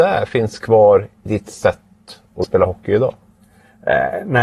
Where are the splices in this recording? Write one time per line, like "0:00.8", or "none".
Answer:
0:01.3
0:02.4